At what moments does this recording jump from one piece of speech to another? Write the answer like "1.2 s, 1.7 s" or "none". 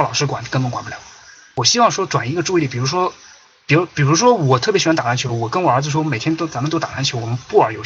none